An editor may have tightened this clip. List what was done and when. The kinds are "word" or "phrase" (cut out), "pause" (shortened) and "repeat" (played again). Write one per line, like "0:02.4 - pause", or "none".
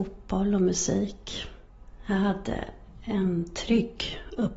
none